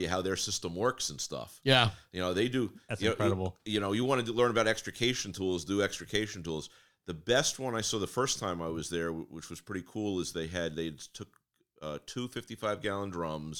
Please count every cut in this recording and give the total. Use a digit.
0